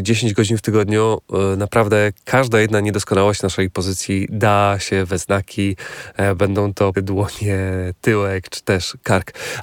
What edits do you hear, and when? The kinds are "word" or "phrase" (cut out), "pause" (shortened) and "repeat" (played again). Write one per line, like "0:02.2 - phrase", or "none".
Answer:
0:06.9 - word